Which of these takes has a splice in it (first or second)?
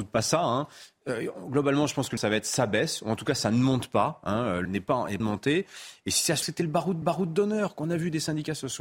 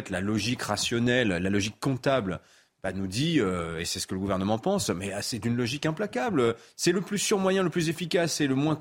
first